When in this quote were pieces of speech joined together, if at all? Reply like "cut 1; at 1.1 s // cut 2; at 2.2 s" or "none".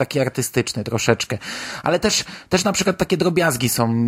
none